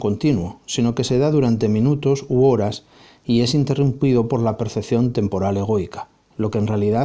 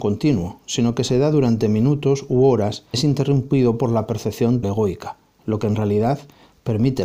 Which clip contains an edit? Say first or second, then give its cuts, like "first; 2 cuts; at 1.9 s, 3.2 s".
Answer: second; 2 cuts; at 2.9 s, 4.6 s